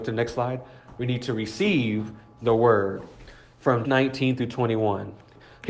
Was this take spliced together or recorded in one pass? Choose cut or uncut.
cut